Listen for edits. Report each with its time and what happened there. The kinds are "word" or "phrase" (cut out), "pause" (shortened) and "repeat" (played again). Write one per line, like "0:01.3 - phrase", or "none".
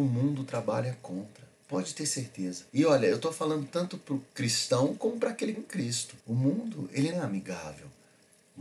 0:01.5 - pause
0:02.7 - pause
0:04.3 - pause
0:05.5 - phrase
0:06.2 - pause
0:07.1 - phrase